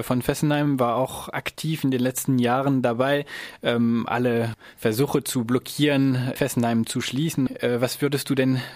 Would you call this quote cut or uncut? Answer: uncut